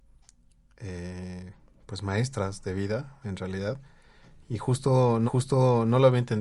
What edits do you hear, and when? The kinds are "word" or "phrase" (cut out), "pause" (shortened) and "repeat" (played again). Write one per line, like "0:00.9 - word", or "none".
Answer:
0:05.3 - repeat